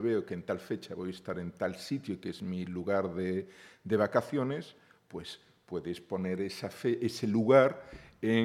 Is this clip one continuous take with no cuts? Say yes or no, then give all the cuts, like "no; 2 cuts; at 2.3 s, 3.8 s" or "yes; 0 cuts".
yes; 0 cuts